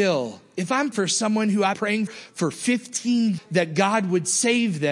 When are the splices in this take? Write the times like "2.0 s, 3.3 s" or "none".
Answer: 0.9 s, 1.7 s, 2.1 s, 3.4 s